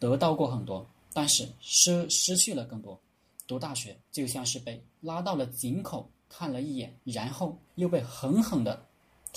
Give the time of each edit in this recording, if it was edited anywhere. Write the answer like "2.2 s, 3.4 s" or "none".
4.0 s, 4.9 s, 7.0 s, 7.7 s